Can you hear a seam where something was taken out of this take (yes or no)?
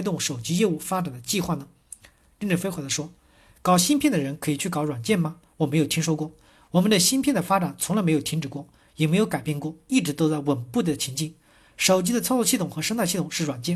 no